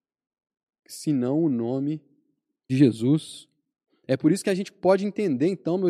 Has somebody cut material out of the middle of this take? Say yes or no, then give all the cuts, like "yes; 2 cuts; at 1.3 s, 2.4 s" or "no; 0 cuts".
yes; 2 cuts; at 2.7 s, 3.9 s